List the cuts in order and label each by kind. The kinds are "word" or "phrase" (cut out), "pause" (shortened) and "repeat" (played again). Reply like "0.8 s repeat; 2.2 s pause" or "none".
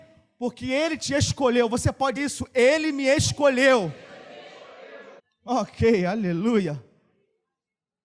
2.2 s word; 5.2 s pause